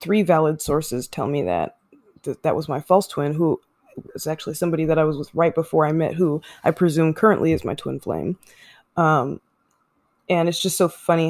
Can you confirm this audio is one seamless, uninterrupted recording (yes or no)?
yes